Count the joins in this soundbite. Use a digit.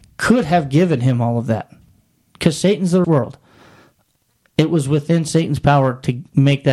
1